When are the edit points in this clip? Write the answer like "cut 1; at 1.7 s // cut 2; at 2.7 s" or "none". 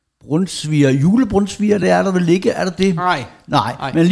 none